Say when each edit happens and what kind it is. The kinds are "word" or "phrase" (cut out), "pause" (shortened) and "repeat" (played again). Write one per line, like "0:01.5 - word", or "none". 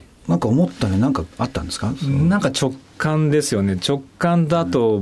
0:01.3 - pause

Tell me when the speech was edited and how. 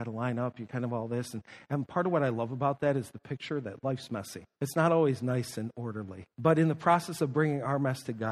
0:04.5 - pause
0:06.3 - pause

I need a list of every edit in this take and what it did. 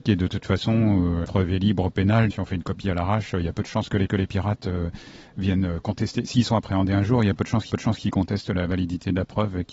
0:01.2 - word
0:02.3 - word
0:04.1 - repeat
0:07.7 - repeat

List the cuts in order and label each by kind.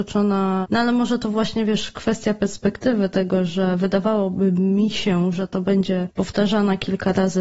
none

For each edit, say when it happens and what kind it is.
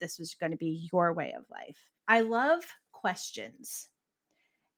0:02.0 - pause

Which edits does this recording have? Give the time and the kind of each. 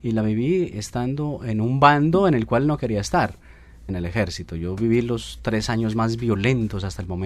0:03.9 - phrase

